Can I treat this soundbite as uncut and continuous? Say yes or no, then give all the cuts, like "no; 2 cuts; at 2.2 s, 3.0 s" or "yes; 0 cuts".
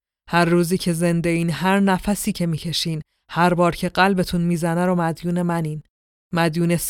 yes; 0 cuts